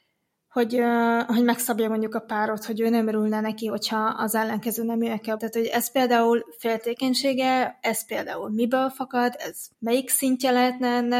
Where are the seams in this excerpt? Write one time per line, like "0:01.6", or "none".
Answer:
0:05.4
0:09.7

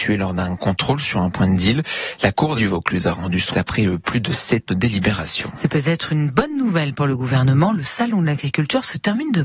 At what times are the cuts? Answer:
0:02.6
0:03.5
0:04.7

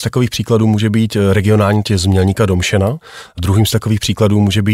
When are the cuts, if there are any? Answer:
0:01.8

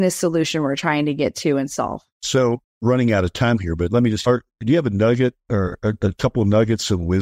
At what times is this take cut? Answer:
0:02.1
0:04.2

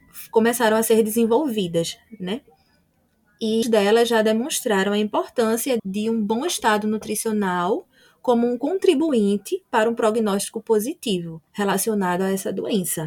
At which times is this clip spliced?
0:03.6
0:05.8
0:11.5

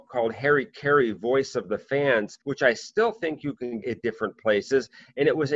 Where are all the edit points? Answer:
0:02.4
0:03.8

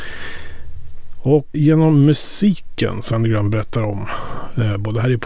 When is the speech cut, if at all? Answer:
0:01.5
0:03.1

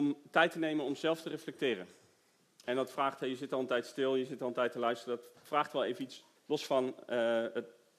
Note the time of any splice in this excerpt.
0:06.4

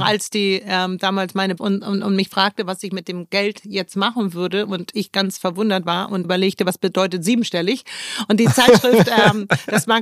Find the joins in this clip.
0:01.6
0:06.2

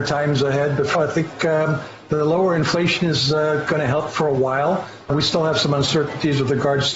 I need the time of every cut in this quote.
0:00.9

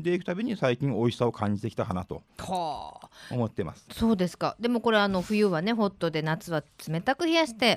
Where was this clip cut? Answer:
0:02.3

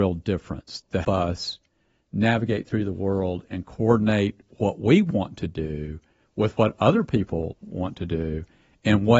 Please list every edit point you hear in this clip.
0:01.0

